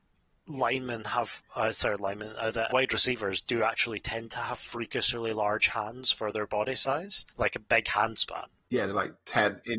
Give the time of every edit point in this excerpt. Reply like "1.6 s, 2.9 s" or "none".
2.7 s, 7.3 s, 8.6 s